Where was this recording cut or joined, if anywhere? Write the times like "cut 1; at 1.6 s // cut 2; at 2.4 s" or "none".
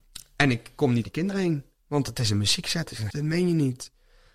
cut 1; at 1.0 s // cut 2; at 3.1 s